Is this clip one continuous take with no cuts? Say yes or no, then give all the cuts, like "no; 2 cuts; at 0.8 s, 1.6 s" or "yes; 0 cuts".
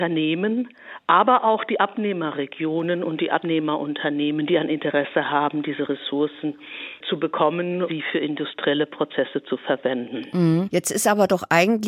no; 1 cut; at 7.9 s